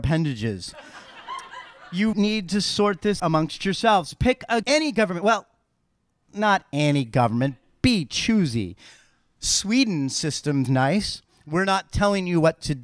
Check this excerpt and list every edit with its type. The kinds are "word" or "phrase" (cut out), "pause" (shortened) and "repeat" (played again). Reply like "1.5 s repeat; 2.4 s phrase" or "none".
2.1 s word; 3.2 s word; 4.6 s word; 10.7 s word